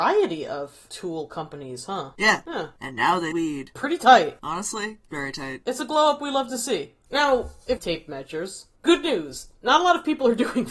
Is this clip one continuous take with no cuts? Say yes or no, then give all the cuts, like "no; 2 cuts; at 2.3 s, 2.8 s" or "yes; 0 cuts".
no; 3 cuts; at 3.3 s, 7.0 s, 7.8 s